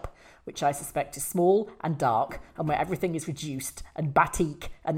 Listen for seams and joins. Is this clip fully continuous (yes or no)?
yes